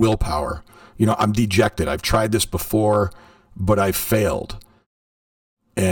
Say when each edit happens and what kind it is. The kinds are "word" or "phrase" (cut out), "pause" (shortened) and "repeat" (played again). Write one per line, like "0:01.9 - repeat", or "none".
none